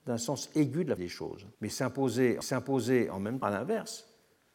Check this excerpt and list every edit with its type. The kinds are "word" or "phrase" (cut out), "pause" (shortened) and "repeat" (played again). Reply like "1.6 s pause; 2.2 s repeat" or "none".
1.0 s word; 1.5 s pause; 2.4 s repeat; 3.4 s word